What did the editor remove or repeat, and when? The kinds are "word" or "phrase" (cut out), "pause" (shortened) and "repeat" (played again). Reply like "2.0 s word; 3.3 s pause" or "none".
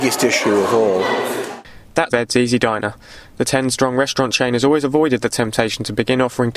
2.1 s phrase